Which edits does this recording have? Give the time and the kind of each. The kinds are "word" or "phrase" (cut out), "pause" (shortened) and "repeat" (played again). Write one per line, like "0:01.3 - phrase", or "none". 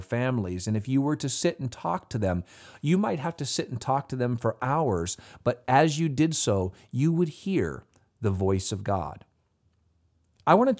none